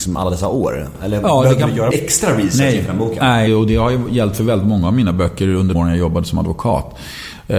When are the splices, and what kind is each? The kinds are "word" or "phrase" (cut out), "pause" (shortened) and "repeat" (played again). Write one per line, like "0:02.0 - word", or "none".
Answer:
0:01.9 - word
0:03.5 - word
0:05.7 - word